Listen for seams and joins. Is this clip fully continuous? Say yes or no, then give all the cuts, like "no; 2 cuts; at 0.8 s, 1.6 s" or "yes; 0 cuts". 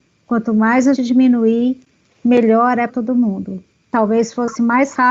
no; 2 cuts; at 1.0 s, 2.9 s